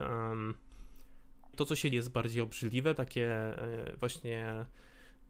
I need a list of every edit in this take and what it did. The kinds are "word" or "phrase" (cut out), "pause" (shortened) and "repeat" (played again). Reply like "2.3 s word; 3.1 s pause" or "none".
1.5 s word; 1.9 s word; 3.0 s word